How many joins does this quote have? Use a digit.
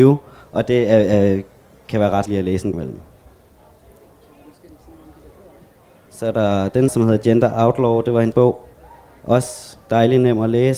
4